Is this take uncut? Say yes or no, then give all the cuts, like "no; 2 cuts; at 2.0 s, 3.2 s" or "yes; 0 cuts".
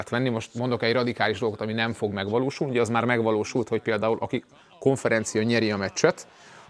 yes; 0 cuts